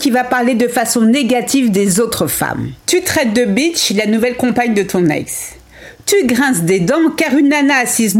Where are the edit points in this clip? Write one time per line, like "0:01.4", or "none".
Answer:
0:02.8

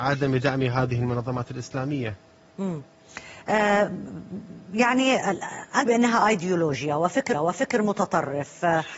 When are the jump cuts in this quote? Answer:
0:05.9
0:07.3

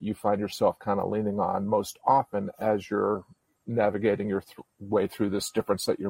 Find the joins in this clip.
none

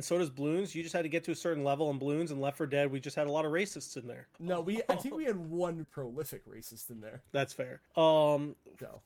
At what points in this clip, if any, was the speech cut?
0:04.3
0:05.8
0:07.9

